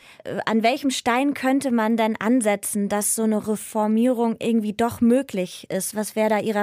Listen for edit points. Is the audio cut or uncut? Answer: uncut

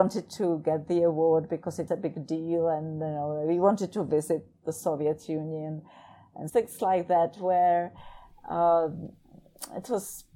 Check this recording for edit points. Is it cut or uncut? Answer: cut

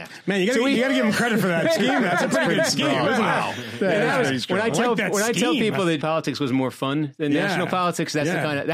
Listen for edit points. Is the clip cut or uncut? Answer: cut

